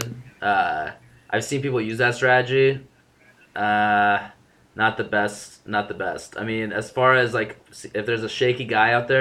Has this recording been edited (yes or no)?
no